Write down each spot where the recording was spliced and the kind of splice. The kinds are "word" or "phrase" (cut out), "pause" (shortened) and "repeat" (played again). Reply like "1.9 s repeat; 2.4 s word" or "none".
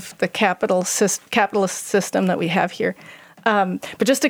none